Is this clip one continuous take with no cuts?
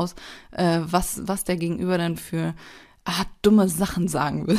yes; 0 cuts

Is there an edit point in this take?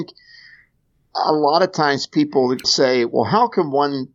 yes; 1 cut; at 2.6 s

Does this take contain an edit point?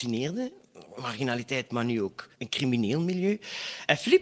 yes; 1 cut; at 2.3 s

